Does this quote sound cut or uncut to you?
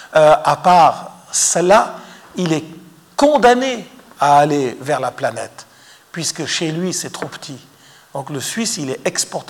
uncut